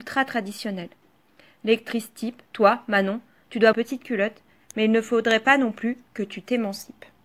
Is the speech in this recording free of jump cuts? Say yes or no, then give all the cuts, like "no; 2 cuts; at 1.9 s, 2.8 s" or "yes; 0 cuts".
no; 2 cuts; at 2.5 s, 3.7 s